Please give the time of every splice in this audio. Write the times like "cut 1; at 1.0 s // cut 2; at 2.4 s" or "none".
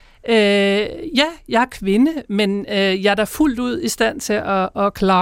none